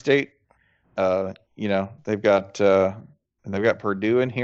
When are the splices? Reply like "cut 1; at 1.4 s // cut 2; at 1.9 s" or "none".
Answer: none